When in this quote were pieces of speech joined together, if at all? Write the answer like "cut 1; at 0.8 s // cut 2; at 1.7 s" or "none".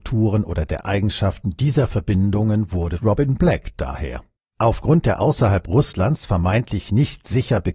cut 1; at 3.0 s // cut 2; at 4.4 s